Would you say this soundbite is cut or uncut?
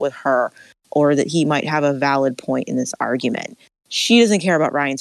uncut